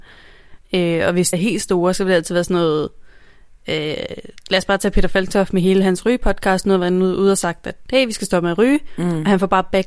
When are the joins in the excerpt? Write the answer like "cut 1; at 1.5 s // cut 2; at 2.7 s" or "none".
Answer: cut 1; at 1.3 s